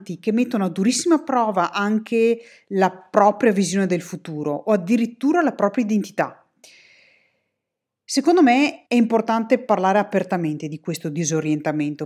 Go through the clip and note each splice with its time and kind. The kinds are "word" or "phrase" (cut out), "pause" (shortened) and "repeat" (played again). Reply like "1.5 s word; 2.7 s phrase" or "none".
8.9 s pause